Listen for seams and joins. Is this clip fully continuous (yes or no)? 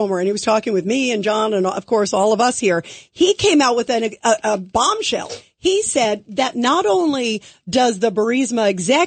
yes